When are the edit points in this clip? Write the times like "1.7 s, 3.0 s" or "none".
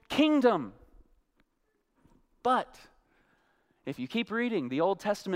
none